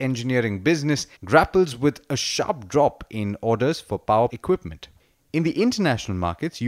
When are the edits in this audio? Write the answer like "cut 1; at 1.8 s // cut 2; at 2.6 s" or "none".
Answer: cut 1; at 1.2 s // cut 2; at 4.3 s